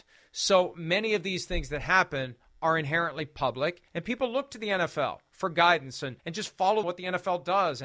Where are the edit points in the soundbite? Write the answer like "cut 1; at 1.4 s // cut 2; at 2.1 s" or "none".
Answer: cut 1; at 3.9 s // cut 2; at 6.2 s // cut 3; at 6.8 s